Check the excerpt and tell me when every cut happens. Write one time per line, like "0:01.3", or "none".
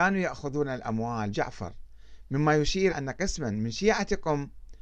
0:01.3
0:02.9